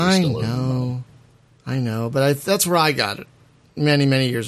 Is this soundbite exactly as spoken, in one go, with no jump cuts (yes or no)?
yes